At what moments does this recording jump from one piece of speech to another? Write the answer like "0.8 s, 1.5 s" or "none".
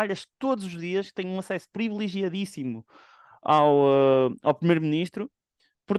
none